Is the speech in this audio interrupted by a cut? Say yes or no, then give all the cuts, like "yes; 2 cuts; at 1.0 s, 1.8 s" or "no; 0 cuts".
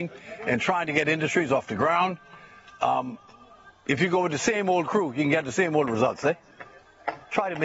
no; 0 cuts